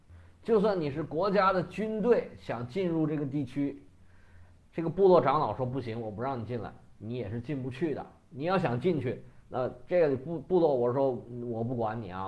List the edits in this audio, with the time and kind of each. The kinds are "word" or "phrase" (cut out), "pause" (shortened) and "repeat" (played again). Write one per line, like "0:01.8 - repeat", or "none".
none